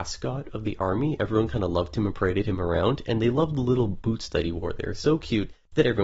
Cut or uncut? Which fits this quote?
uncut